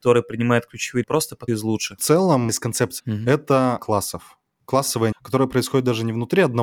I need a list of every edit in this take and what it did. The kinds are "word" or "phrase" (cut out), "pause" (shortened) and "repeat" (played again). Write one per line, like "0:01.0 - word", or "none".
0:01.0 - word
0:01.5 - phrase
0:02.5 - word
0:03.0 - word
0:03.8 - word
0:05.1 - word